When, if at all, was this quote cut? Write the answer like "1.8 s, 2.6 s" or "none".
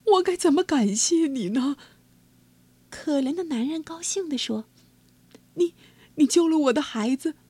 none